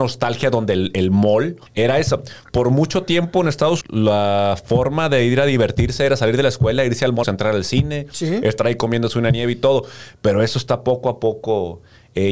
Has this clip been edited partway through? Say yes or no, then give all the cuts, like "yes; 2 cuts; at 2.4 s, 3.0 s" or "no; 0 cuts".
yes; 3 cuts; at 1.7 s, 3.8 s, 7.2 s